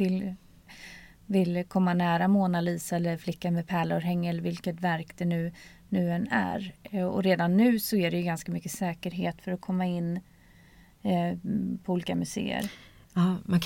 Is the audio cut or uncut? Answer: uncut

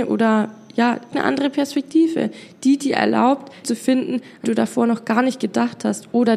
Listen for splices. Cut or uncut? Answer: cut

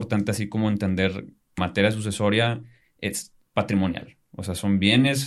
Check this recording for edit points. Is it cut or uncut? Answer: cut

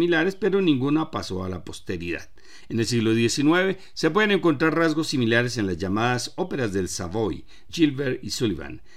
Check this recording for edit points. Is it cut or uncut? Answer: cut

